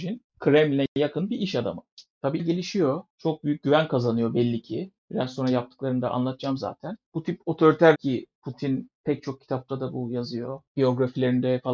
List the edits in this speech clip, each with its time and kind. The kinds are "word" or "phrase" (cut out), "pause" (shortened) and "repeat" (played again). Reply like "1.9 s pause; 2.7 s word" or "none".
2.4 s word; 7.9 s word